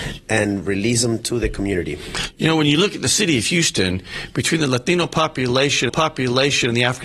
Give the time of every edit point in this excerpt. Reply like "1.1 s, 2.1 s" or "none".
5.9 s